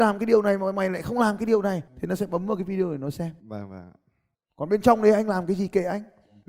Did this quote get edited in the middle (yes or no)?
yes